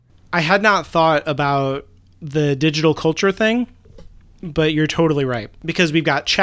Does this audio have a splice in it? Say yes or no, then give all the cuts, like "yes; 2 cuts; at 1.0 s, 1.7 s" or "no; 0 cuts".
no; 0 cuts